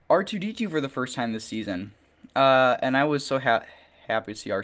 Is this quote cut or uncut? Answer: uncut